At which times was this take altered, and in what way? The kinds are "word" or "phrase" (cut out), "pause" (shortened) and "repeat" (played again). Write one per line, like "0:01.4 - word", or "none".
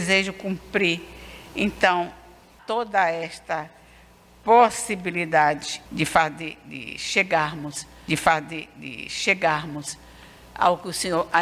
0:02.6 - word
0:05.8 - word
0:08.1 - repeat